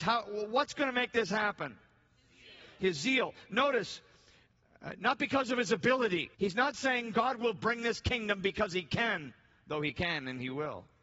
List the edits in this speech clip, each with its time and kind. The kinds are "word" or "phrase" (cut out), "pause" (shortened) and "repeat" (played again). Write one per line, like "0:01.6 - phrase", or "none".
0:06.3 - pause